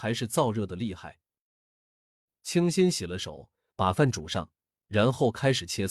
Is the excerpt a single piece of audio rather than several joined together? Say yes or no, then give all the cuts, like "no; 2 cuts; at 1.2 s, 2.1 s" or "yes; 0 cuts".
yes; 0 cuts